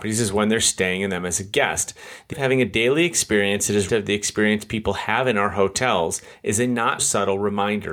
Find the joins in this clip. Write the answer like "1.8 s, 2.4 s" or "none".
2.3 s, 3.9 s, 7.0 s